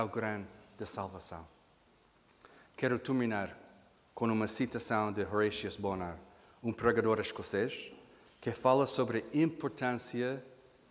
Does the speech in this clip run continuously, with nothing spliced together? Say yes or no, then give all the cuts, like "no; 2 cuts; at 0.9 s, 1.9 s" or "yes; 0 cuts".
yes; 0 cuts